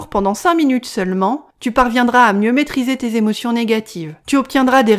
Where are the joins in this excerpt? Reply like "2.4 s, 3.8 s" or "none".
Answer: 1.5 s